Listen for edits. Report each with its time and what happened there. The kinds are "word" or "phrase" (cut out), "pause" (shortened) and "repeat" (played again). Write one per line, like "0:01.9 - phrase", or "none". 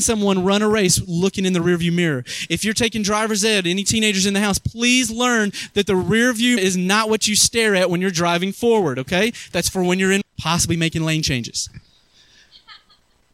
0:06.6 - word
0:10.2 - word